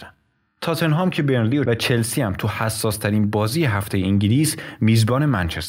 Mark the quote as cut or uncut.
cut